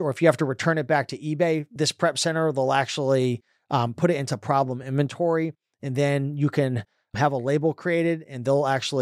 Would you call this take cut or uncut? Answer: uncut